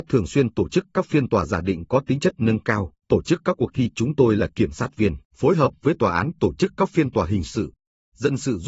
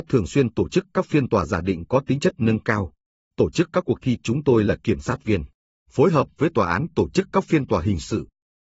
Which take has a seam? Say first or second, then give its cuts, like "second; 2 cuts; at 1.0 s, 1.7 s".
first; 2 cuts; at 3.0 s, 5.3 s